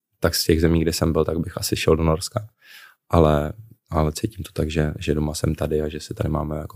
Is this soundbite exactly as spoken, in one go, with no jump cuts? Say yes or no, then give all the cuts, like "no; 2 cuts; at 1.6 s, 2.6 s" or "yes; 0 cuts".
yes; 0 cuts